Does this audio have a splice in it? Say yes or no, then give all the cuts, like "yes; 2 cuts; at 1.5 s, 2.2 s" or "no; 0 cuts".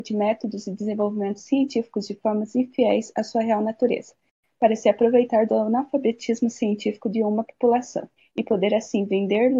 no; 0 cuts